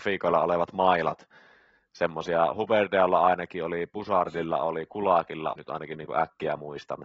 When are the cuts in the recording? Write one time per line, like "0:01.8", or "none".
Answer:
0:05.5